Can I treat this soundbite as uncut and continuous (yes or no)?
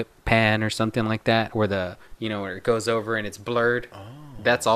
yes